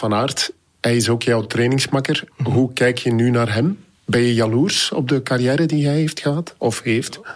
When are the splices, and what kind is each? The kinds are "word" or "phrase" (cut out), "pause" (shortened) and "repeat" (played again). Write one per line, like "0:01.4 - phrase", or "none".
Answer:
none